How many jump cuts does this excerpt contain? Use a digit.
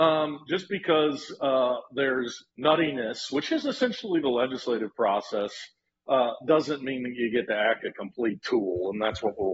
2